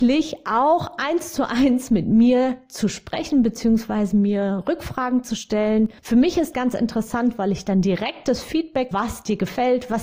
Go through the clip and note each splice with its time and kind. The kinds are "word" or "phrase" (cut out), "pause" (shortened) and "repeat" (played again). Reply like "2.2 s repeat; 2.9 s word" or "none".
6.0 s pause; 6.5 s word; 8.9 s word